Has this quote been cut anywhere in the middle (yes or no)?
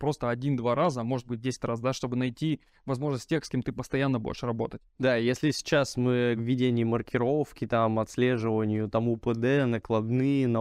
yes